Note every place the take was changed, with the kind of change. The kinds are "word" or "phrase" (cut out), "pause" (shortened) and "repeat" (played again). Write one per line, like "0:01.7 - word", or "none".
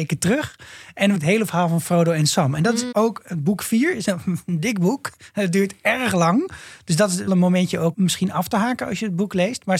0:01.1 - phrase
0:02.9 - word
0:04.0 - word
0:07.3 - word
0:07.9 - word